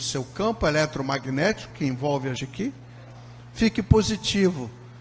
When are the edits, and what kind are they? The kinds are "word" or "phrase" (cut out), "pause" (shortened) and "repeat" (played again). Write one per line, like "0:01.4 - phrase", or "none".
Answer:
0:01.7 - word
0:02.4 - word